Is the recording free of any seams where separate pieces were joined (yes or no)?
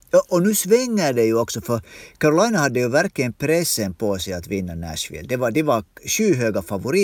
yes